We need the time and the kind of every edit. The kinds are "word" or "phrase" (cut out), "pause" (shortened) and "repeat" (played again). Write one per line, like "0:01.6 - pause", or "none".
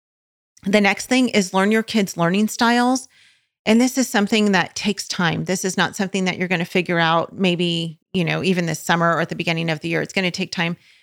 0:08.0 - pause